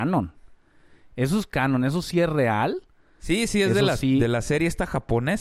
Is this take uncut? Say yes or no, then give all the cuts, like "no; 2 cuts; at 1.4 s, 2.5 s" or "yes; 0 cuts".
yes; 0 cuts